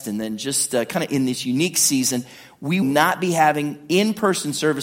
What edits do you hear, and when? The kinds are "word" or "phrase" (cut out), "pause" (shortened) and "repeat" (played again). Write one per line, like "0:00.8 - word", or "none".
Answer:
0:02.8 - word